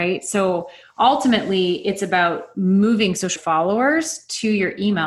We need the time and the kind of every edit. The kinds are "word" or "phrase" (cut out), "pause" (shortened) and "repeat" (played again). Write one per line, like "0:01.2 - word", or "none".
0:03.4 - word